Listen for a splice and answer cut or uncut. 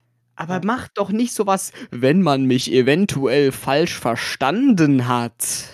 uncut